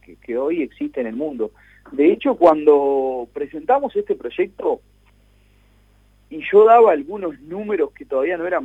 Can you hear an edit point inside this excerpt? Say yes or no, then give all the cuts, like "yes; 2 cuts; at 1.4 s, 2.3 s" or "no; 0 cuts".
no; 0 cuts